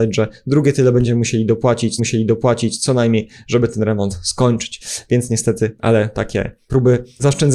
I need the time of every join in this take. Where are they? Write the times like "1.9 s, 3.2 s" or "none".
2.0 s